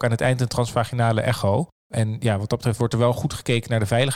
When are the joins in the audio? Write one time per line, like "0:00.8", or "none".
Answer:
none